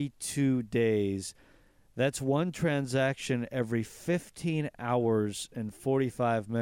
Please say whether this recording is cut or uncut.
uncut